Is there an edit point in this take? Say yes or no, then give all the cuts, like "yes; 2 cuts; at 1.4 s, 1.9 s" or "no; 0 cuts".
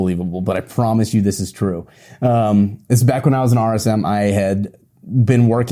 no; 0 cuts